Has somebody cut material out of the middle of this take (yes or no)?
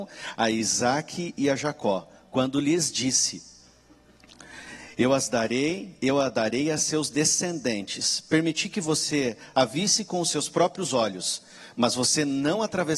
no